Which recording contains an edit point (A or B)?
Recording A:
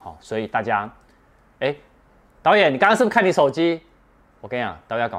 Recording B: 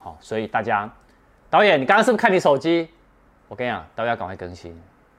B